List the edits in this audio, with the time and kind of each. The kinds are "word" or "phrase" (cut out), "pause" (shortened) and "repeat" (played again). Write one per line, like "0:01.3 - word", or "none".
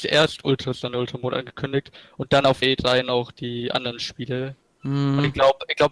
0:02.6 - word